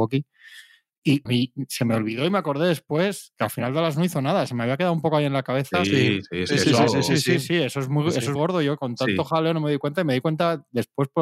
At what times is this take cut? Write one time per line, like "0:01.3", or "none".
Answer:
0:01.3
0:08.4